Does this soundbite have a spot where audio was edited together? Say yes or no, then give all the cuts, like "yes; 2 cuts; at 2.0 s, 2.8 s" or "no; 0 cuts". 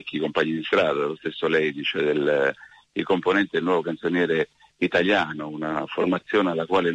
no; 0 cuts